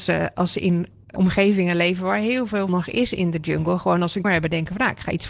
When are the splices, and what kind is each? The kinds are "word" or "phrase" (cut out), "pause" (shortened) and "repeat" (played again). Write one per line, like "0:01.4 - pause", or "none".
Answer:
0:01.2 - word
0:02.7 - word
0:04.2 - phrase

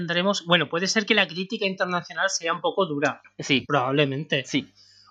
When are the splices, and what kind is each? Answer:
none

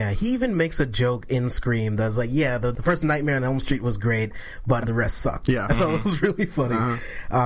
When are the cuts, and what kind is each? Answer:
0:04.8 - word

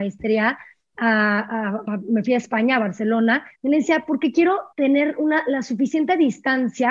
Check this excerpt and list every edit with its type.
0:03.5 - pause
0:04.7 - pause

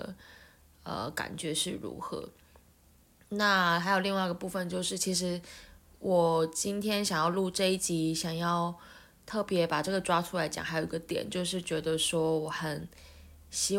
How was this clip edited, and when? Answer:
none

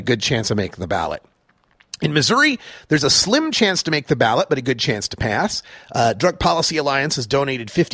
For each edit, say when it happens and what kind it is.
none

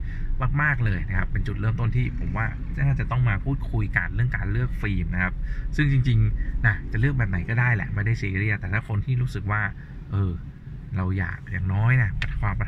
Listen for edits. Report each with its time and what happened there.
none

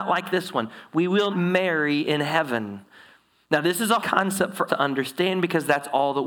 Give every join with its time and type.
0:01.3 - word
0:04.0 - word
0:04.7 - word

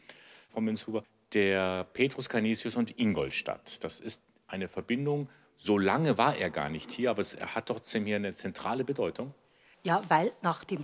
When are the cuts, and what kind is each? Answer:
none

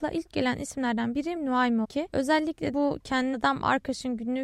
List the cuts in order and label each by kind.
0:01.4 - word
0:01.8 - phrase
0:02.7 - word
0:03.3 - word

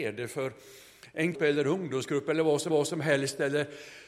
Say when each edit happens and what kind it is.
0:01.3 - phrase
0:02.7 - repeat

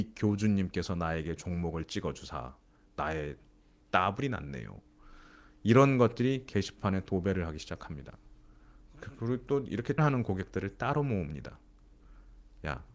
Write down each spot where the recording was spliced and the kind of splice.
0:03.8 - word
0:10.0 - word

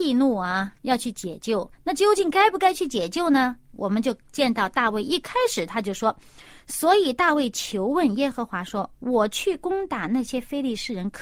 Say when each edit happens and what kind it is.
0:01.7 - pause

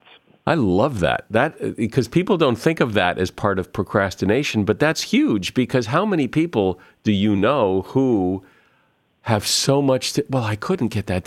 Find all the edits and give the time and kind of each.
none

